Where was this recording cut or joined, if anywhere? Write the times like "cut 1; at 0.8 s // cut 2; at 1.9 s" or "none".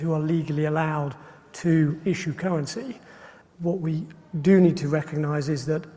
none

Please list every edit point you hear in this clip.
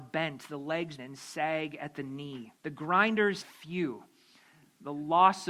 cut 1; at 1.0 s // cut 2; at 2.6 s // cut 3; at 3.4 s

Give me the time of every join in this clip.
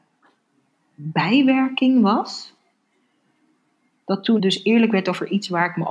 cut 1; at 4.4 s

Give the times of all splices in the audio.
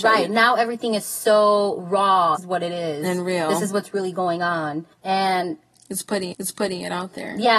cut 1; at 2.4 s // cut 2; at 4.9 s // cut 3; at 6.3 s

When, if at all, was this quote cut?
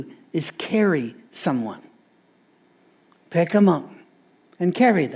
none

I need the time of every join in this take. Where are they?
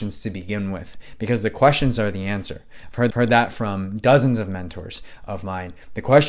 cut 1; at 3.1 s

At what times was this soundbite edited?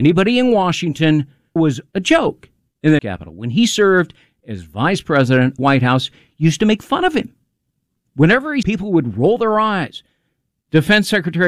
cut 1; at 1.6 s // cut 2; at 1.9 s // cut 3; at 3.0 s // cut 4; at 5.6 s // cut 5; at 8.6 s

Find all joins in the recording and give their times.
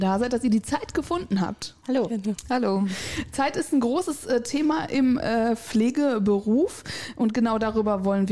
cut 1; at 1.8 s

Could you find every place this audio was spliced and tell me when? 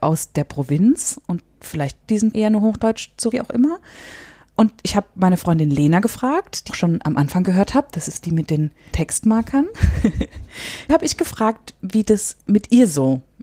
cut 1; at 2.0 s // cut 2; at 2.3 s // cut 3; at 3.3 s // cut 4; at 6.7 s // cut 5; at 8.9 s // cut 6; at 10.9 s

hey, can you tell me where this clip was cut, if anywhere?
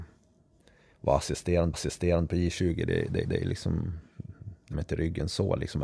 cut 1; at 1.7 s // cut 2; at 3.2 s // cut 3; at 4.7 s

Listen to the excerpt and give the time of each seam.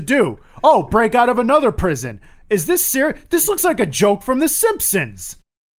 none

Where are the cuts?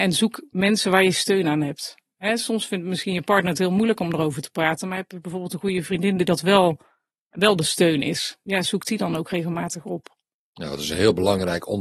none

